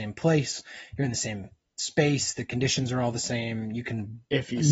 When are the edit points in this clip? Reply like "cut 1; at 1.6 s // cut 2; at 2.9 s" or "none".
none